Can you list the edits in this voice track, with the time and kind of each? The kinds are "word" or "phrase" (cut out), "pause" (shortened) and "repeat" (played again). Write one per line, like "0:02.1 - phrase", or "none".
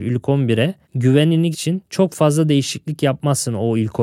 0:01.5 - word